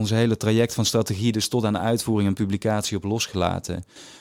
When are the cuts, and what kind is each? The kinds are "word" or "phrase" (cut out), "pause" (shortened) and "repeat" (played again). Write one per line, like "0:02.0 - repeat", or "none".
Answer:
none